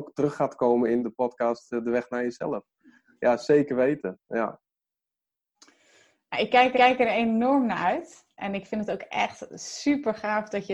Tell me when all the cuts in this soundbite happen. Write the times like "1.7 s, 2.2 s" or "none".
1.0 s, 6.7 s

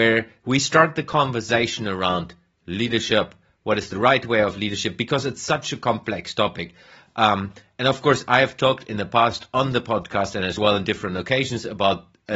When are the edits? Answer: none

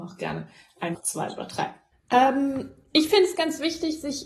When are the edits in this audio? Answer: 0.9 s, 1.9 s

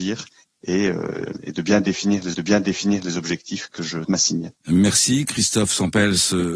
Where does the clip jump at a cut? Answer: 2.3 s, 4.0 s, 4.6 s

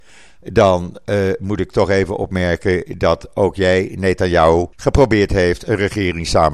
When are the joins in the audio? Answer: 4.7 s

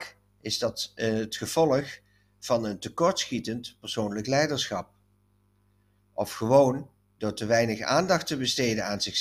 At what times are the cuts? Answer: none

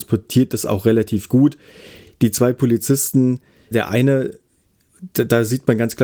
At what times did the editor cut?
3.7 s

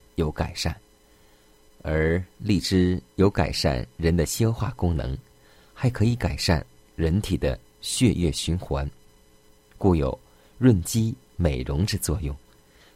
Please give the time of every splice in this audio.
none

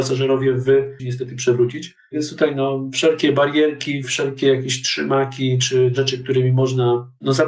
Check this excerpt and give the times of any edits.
1.0 s

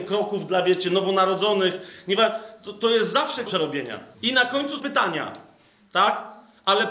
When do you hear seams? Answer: 3.5 s, 4.1 s, 4.8 s

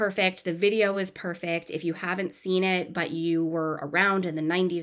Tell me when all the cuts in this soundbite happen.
none

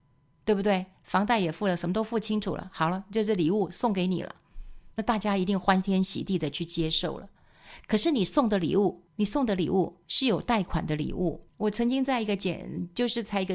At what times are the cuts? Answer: 4.9 s, 9.1 s, 10.0 s, 11.5 s

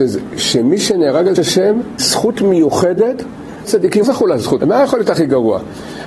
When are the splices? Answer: 1.4 s, 2.0 s, 3.6 s, 4.0 s, 4.6 s

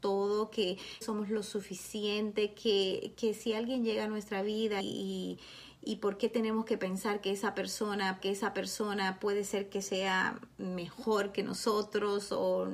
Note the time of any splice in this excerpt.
1.0 s, 4.8 s, 8.2 s

